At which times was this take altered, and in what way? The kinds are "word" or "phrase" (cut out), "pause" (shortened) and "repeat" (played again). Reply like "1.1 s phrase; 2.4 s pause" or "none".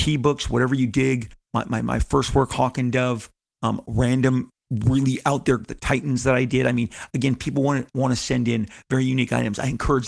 5.6 s phrase